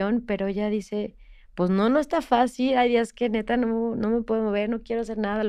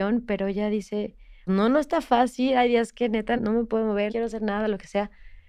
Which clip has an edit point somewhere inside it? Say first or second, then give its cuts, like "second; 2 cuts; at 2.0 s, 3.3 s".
second; 3 cuts; at 1.5 s, 3.4 s, 4.1 s